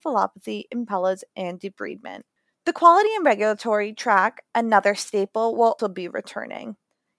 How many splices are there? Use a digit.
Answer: 1